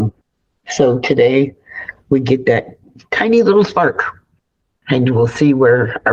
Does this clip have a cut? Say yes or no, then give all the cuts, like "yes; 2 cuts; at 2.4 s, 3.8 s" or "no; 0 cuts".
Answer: no; 0 cuts